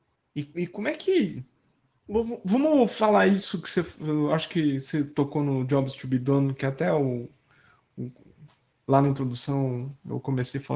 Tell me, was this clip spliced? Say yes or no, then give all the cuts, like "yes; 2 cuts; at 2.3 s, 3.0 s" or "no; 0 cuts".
no; 0 cuts